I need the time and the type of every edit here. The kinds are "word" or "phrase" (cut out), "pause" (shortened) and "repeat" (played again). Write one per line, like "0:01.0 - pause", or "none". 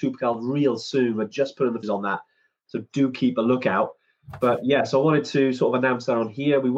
0:01.8 - phrase